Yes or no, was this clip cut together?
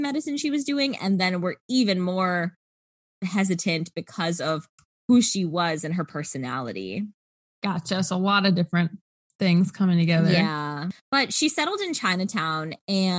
no